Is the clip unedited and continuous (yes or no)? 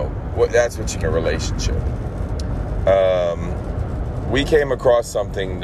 no